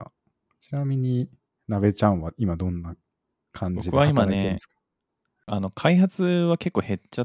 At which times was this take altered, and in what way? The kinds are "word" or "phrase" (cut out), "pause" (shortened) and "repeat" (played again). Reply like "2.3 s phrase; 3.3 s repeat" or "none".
none